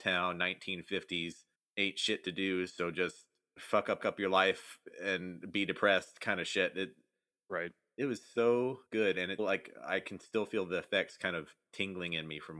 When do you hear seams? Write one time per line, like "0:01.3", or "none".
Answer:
0:01.5
0:04.0
0:08.9
0:09.4